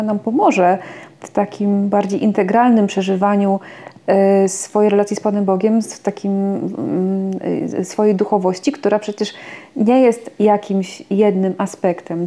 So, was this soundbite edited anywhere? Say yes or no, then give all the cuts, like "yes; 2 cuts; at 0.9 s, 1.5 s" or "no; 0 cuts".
no; 0 cuts